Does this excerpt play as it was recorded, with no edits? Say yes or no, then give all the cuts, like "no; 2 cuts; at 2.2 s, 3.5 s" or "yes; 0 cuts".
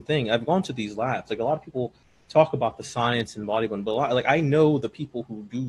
yes; 0 cuts